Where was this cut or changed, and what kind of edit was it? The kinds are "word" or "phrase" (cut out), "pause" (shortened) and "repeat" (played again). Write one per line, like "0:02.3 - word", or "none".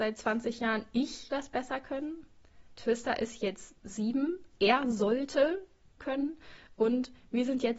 0:01.3 - word
0:03.8 - pause
0:06.0 - word